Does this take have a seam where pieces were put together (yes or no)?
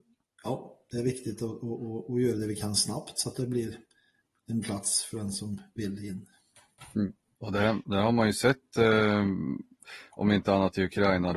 no